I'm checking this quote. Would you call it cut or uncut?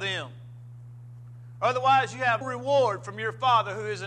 cut